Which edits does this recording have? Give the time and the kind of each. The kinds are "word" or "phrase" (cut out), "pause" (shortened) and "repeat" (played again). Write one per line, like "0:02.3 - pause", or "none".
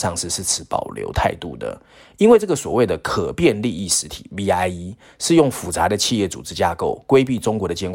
none